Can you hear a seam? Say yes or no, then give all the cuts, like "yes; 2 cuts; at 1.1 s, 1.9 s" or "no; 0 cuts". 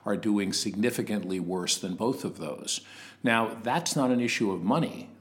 no; 0 cuts